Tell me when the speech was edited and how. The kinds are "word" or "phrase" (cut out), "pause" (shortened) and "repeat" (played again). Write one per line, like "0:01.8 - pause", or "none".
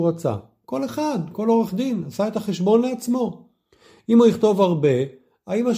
none